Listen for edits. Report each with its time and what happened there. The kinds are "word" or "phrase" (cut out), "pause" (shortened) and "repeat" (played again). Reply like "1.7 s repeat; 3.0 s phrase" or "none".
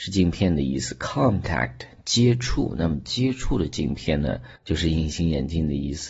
4.6 s pause